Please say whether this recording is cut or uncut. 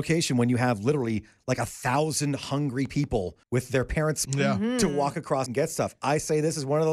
cut